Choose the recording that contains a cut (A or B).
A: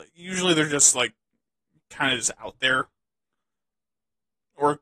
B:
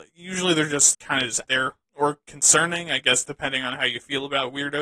B